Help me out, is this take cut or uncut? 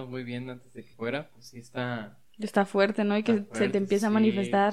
cut